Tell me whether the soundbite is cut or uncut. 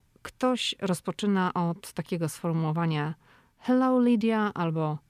uncut